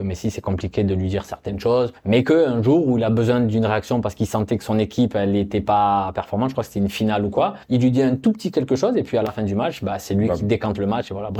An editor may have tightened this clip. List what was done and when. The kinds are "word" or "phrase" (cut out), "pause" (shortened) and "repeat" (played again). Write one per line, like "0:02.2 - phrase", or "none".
0:02.0 - pause
0:07.6 - pause

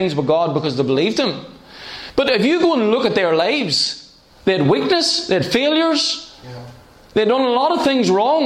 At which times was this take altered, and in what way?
none

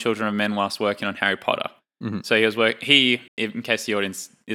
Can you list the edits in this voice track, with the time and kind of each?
0:03.3 - pause

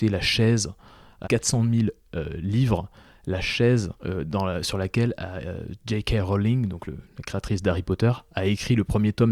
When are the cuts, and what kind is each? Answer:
0:01.2 - word
0:04.0 - pause

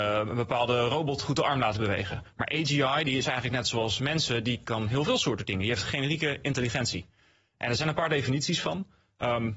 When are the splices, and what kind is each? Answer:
none

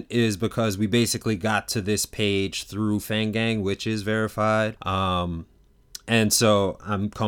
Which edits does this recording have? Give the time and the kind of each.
0:04.8 - pause

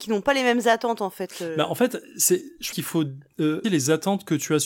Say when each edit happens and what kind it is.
0:02.7 - word
0:03.6 - word

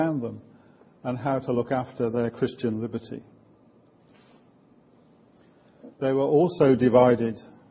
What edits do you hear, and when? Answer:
0:05.9 - pause

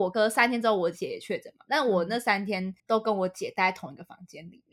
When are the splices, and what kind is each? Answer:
0:02.8 - pause

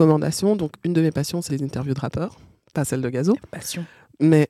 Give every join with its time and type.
0:01.5 - word

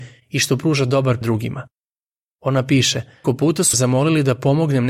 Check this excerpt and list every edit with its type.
0:01.2 - word
0:03.2 - word
0:03.7 - word

